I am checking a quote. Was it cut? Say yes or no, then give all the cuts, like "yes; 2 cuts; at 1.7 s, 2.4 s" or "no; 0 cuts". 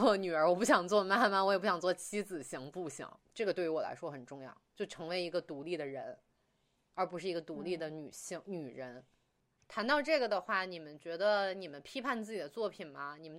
no; 0 cuts